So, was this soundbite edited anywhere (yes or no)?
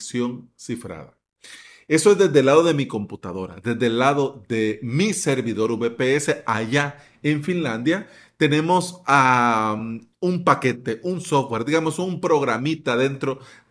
no